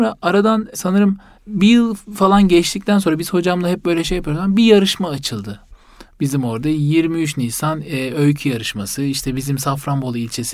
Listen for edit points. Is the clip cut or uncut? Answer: uncut